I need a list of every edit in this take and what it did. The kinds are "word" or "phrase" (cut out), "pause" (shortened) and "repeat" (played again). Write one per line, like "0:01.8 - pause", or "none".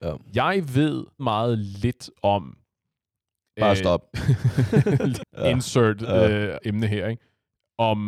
0:01.2 - word
0:04.1 - pause
0:05.2 - phrase
0:06.6 - word